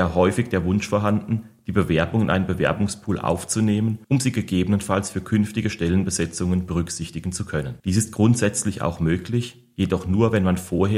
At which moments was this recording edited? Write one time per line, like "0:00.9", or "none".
0:04.0
0:07.8